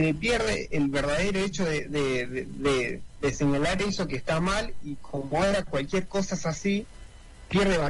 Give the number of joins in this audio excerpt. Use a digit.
0